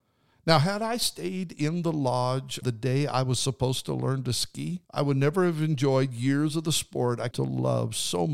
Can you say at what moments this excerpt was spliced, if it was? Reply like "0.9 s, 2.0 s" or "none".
2.6 s, 4.8 s, 7.3 s